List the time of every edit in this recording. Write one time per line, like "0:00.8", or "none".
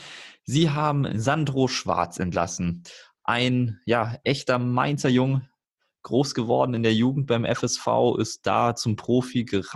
none